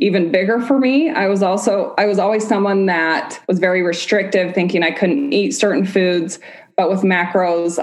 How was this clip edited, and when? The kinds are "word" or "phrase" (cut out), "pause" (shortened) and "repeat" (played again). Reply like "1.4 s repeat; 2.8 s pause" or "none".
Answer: 3.4 s pause